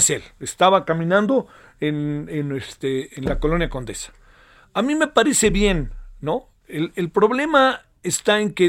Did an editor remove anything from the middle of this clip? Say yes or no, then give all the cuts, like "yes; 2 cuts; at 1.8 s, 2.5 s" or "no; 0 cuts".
no; 0 cuts